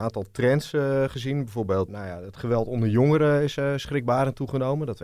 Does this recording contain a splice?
yes; 1 cut; at 1.9 s

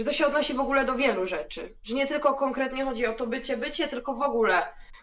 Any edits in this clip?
no; 0 cuts

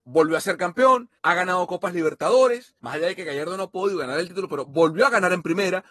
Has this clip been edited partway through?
yes; 2 cuts; at 1.2 s, 2.8 s

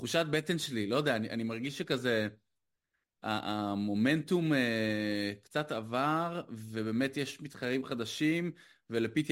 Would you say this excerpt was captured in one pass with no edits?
yes; 0 cuts

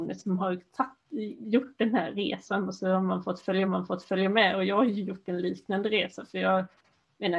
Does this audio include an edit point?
yes; 1 cut; at 3.6 s

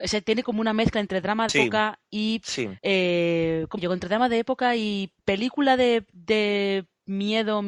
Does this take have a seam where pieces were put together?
yes; 4 cuts; at 1.5 s, 2.8 s, 3.8 s, 5.2 s

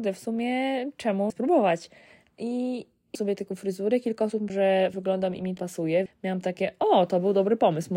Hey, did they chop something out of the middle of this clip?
yes; 6 cuts; at 1.3 s, 3.1 s, 4.5 s, 4.9 s, 5.6 s, 6.1 s

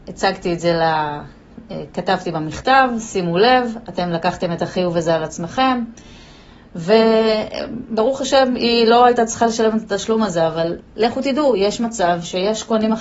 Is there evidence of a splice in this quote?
no; 0 cuts

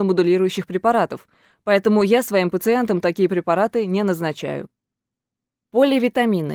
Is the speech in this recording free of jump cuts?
yes; 0 cuts

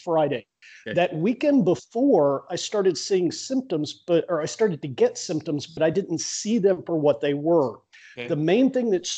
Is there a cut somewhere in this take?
no; 0 cuts

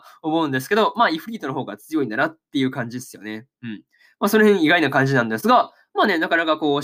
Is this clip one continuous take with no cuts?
yes; 0 cuts

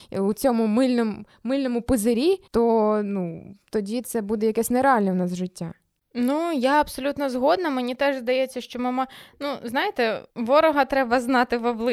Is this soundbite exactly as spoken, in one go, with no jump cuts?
no; 2 cuts; at 2.5 s, 10.3 s

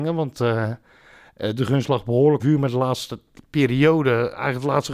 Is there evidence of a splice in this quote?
yes; 1 cut; at 2.4 s

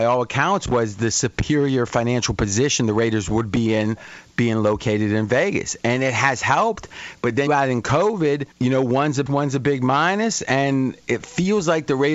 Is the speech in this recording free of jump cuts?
no; 3 cuts; at 7.5 s, 8.5 s, 9.3 s

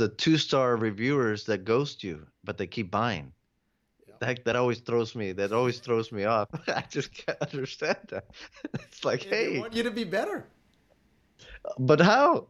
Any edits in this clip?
no; 0 cuts

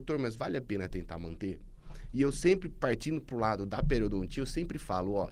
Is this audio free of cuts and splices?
yes; 0 cuts

